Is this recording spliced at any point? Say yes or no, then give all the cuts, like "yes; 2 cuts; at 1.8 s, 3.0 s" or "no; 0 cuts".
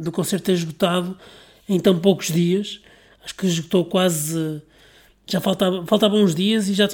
no; 0 cuts